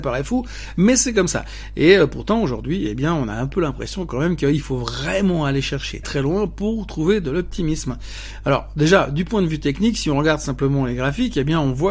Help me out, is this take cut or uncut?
cut